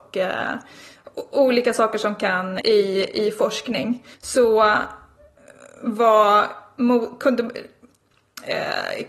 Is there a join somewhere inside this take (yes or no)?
yes